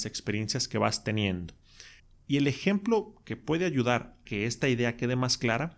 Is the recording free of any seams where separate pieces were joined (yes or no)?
no